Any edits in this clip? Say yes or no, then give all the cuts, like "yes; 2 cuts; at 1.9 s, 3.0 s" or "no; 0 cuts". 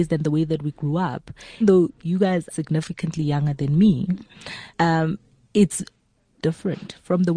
yes; 4 cuts; at 1.6 s, 2.5 s, 4.7 s, 6.4 s